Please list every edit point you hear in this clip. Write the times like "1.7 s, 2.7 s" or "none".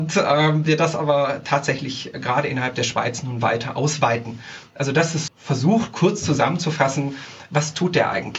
5.3 s